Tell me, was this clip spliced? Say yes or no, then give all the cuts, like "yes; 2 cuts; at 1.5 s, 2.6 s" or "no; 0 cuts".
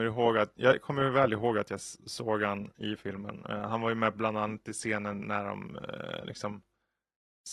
no; 0 cuts